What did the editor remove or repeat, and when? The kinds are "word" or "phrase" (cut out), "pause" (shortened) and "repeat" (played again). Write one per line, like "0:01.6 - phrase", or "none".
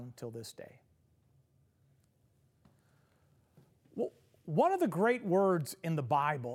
none